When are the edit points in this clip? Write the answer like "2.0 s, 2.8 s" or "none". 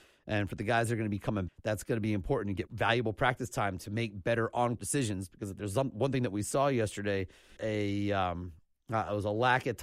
1.5 s, 2.7 s, 4.8 s, 7.6 s